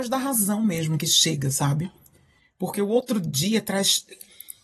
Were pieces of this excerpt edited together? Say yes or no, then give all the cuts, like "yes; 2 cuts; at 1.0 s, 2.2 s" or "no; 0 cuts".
no; 0 cuts